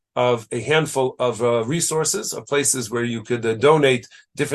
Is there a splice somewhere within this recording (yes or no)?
no